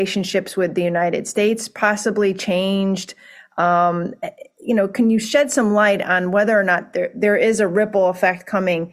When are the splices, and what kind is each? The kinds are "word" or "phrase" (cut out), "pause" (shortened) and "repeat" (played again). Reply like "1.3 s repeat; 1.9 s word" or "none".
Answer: none